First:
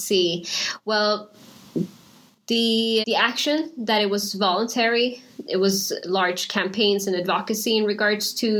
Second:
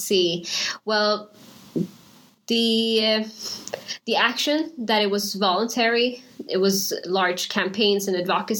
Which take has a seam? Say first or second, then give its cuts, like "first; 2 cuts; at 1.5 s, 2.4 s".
first; 1 cut; at 3.0 s